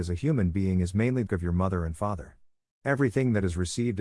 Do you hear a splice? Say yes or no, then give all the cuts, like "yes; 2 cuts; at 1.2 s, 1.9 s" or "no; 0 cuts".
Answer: yes; 1 cut; at 1.3 s